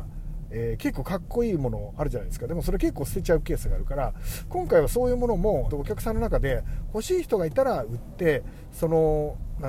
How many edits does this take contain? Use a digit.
1